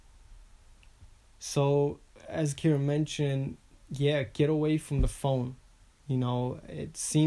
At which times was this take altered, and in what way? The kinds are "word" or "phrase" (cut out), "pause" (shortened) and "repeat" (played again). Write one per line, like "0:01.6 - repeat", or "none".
none